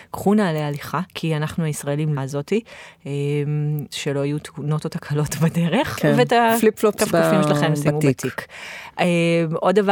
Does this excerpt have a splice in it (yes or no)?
yes